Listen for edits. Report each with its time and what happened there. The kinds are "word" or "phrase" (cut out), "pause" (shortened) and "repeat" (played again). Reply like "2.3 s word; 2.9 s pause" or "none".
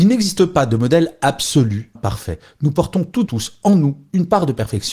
1.9 s phrase; 3.3 s word